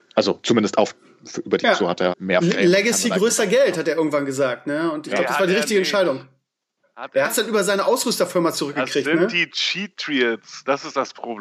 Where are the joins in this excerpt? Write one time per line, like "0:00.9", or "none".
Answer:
0:01.6
0:02.1
0:07.2